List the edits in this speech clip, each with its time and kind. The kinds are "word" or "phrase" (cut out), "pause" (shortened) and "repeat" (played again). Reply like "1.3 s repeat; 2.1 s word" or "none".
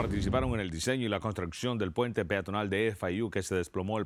none